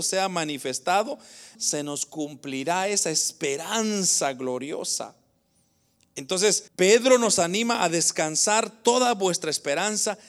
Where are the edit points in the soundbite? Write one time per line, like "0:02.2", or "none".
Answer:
0:01.5
0:06.7